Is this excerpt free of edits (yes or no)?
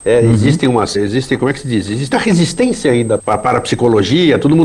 no